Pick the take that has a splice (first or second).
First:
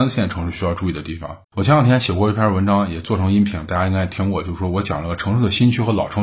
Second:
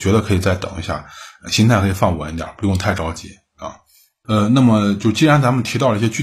first